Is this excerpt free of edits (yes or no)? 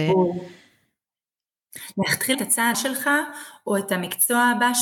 no